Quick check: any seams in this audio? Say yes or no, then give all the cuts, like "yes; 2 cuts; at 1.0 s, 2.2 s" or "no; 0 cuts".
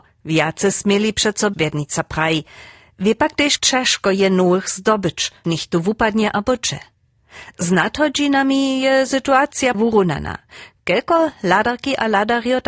yes; 4 cuts; at 1.5 s, 3.6 s, 5.4 s, 9.7 s